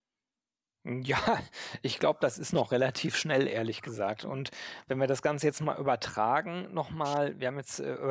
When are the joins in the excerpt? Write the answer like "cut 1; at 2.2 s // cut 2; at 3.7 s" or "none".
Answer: none